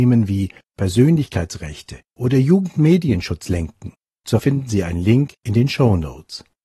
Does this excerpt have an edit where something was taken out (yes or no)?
yes